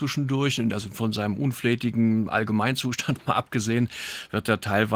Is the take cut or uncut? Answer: uncut